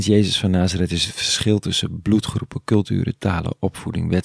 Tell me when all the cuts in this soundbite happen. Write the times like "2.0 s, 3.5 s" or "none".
none